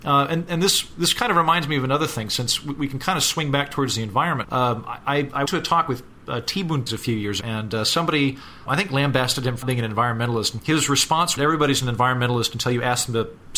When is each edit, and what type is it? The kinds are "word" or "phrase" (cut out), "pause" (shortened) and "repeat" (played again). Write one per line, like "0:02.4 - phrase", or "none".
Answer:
0:04.4 - word
0:05.5 - word
0:06.9 - word
0:07.4 - word
0:08.7 - word
0:09.6 - word
0:10.6 - word
0:11.4 - word